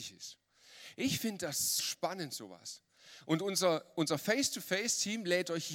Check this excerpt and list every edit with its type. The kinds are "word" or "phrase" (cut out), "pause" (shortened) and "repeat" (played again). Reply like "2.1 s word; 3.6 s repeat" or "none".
1.8 s word